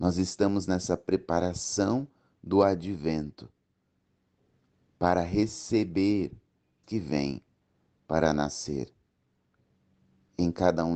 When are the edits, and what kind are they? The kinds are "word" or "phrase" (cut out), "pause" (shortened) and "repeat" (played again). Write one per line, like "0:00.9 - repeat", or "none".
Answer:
0:06.8 - word